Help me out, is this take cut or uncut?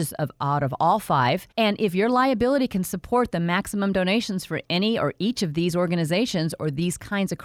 cut